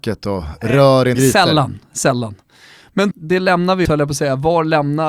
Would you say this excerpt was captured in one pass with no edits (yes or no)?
no